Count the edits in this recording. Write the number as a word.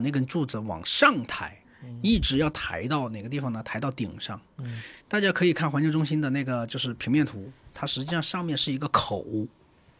one